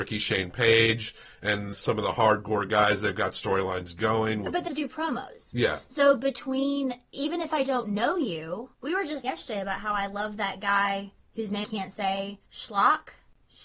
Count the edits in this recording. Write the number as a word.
six